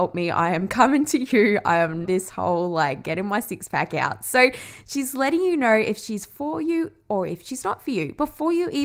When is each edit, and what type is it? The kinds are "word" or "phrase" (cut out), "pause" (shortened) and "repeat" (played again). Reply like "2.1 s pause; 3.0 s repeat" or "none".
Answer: 2.0 s phrase